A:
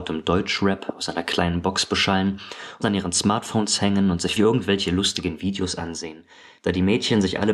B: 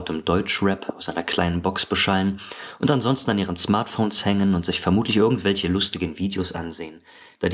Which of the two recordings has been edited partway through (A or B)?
A